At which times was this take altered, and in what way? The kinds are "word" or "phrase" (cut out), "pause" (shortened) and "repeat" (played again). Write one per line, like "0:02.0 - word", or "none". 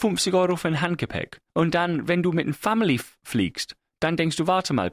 0:01.5 - pause

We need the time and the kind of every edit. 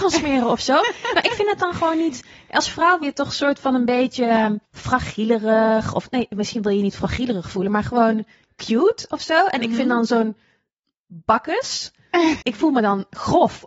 0:03.0 - word
0:04.6 - pause
0:12.4 - word

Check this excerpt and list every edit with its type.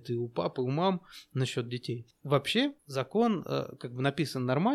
0:02.8 - pause

